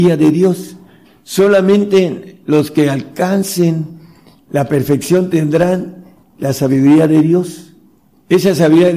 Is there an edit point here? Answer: no; 0 cuts

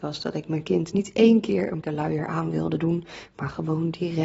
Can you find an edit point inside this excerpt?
yes; 1 cut; at 1.8 s

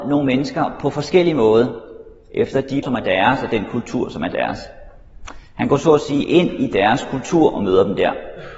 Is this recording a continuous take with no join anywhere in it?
no; 1 cut; at 2.8 s

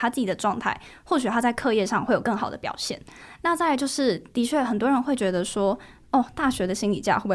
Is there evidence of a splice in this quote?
no; 0 cuts

